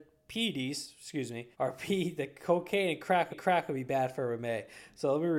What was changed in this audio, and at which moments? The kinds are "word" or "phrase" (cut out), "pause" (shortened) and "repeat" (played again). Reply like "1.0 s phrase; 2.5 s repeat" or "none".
1.5 s pause; 3.3 s repeat